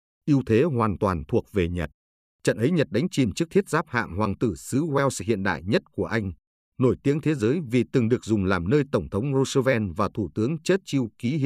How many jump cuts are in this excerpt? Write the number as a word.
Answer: zero